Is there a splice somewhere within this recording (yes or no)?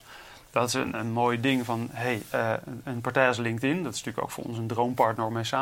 no